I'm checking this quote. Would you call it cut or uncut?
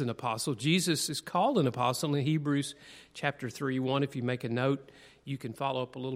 uncut